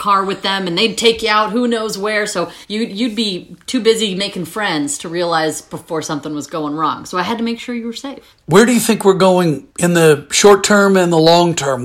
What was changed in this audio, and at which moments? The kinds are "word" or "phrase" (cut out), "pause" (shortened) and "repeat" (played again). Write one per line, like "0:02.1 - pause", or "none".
0:02.6 - pause
0:08.4 - pause
0:09.7 - pause